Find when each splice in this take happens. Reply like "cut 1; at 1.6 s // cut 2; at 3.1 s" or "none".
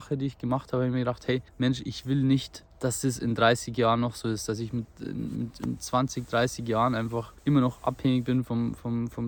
cut 1; at 1.5 s // cut 2; at 2.7 s // cut 3; at 7.4 s